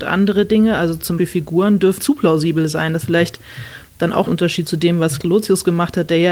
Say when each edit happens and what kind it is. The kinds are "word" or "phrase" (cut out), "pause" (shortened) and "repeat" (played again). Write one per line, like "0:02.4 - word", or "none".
0:01.2 - word
0:02.0 - word
0:03.0 - word
0:04.3 - word
0:05.2 - word